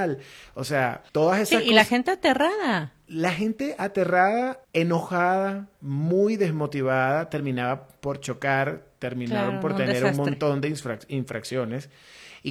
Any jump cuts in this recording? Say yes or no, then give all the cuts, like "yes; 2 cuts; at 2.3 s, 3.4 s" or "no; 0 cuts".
yes; 2 cuts; at 1.1 s, 4.6 s